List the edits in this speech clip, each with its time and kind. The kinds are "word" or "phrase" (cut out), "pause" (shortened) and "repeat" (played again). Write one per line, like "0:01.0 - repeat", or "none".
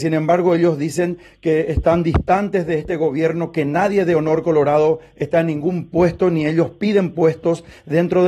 none